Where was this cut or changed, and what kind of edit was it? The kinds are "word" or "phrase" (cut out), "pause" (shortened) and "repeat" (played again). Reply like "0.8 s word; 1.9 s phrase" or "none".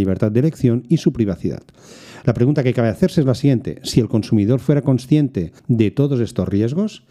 5.6 s pause